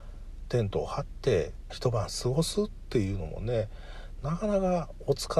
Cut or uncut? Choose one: cut